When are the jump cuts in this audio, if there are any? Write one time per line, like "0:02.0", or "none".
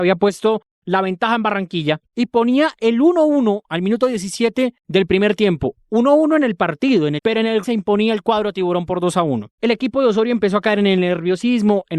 0:02.1
0:04.8
0:07.2
0:07.6